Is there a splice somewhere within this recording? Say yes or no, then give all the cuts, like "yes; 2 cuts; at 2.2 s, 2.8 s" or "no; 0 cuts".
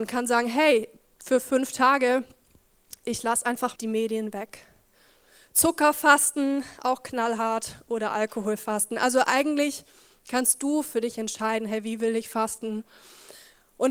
yes; 1 cut; at 3.8 s